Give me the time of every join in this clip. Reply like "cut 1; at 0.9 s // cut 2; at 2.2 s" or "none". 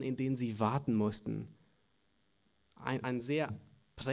cut 1; at 3.0 s